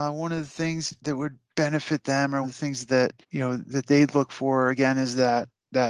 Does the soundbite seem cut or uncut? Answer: cut